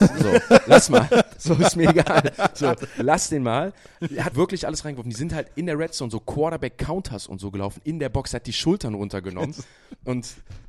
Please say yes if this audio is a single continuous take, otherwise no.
no